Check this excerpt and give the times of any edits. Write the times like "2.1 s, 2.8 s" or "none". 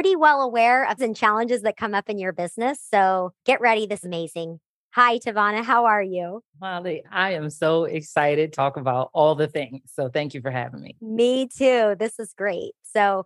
1.0 s, 3.4 s, 4.0 s, 6.5 s, 8.5 s